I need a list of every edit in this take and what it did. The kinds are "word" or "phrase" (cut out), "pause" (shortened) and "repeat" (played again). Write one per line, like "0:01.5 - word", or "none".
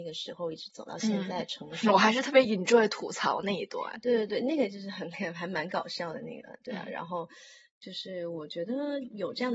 none